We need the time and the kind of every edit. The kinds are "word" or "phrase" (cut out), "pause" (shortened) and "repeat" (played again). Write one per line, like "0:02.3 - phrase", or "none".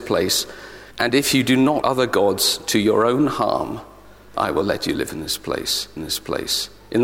0:00.9 - pause
0:01.8 - word
0:04.3 - word
0:06.0 - repeat